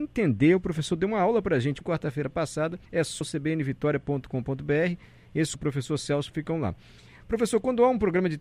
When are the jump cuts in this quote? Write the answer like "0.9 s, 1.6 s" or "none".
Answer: 1.8 s, 2.9 s, 3.2 s, 5.5 s